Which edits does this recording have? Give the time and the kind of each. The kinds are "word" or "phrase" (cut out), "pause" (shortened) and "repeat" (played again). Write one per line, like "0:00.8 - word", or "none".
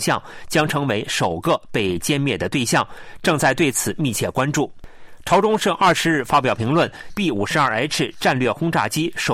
0:07.1 - phrase

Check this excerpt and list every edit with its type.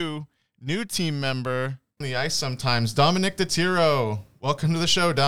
0:02.0 - phrase

